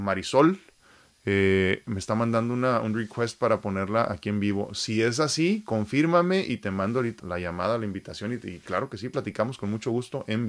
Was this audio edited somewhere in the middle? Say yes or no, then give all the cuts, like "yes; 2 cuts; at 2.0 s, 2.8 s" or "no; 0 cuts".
yes; 1 cut; at 7.2 s